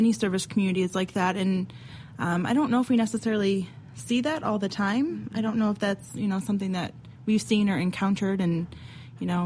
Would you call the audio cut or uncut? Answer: uncut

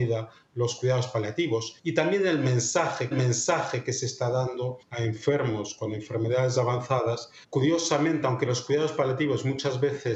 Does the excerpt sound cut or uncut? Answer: cut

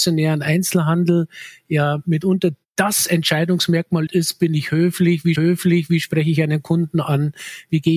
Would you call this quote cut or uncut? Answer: cut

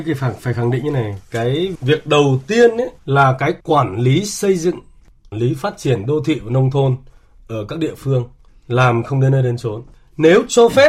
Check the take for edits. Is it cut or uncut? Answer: cut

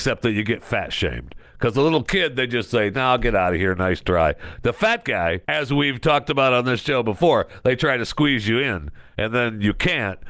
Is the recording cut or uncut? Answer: cut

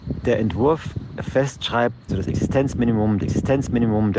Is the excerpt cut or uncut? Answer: cut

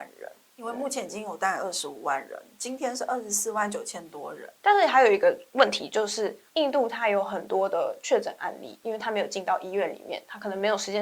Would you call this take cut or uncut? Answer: cut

